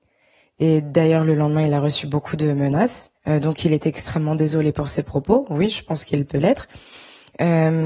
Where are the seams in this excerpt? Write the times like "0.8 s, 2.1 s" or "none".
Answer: 3.2 s